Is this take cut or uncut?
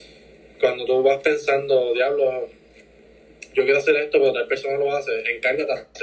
uncut